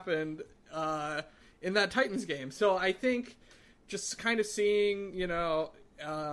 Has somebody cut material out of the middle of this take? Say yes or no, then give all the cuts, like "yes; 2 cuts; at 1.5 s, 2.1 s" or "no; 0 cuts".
no; 0 cuts